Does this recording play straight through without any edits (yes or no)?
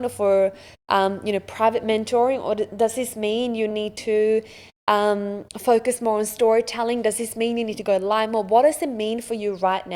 yes